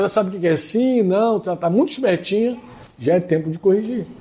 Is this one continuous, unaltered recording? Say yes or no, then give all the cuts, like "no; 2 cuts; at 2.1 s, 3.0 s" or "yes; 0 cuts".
yes; 0 cuts